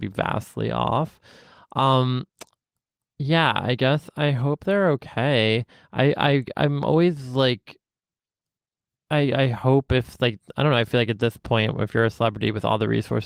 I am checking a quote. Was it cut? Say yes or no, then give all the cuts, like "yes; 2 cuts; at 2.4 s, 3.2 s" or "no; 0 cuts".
no; 0 cuts